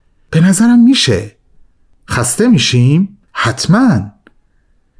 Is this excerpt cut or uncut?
uncut